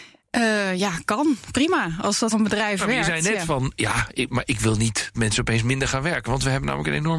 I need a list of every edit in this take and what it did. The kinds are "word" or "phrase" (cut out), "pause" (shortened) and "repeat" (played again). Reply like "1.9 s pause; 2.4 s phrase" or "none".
2.3 s word; 5.1 s word